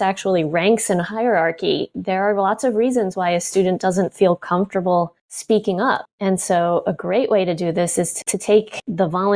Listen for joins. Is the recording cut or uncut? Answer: uncut